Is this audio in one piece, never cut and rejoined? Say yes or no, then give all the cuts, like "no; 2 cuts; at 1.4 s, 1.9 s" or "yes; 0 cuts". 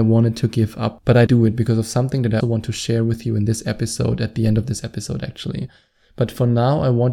no; 2 cuts; at 1.3 s, 2.4 s